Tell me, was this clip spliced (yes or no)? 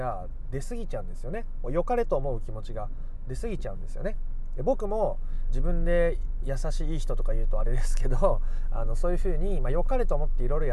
yes